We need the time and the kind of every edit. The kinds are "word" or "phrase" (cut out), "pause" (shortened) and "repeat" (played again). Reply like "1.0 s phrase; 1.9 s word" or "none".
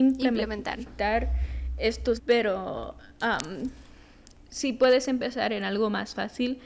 2.2 s word